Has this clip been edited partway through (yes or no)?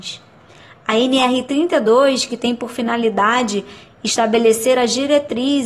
no